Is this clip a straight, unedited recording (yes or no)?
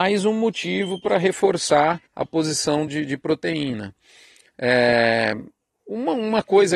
no